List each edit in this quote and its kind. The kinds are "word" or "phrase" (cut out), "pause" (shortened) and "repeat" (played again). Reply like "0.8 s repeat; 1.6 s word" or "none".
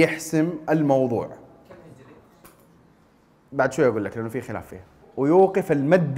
5.0 s word